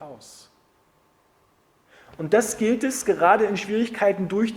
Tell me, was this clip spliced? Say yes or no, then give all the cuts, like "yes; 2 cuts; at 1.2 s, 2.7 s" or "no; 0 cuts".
no; 0 cuts